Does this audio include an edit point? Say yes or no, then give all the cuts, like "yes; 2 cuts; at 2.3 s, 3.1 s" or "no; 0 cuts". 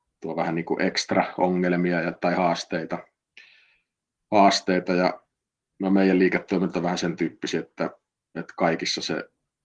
no; 0 cuts